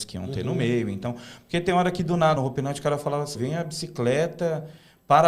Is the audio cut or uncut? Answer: cut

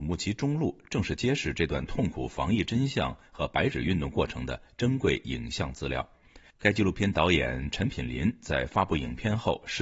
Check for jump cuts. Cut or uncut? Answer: uncut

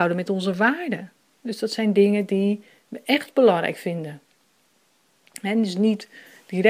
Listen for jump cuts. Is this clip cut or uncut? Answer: uncut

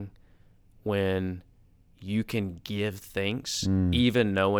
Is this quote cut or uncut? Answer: uncut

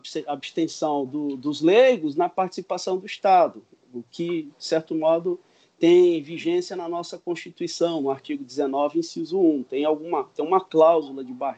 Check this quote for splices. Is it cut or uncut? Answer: uncut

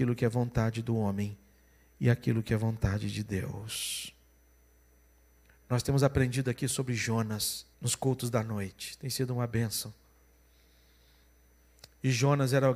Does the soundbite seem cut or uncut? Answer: cut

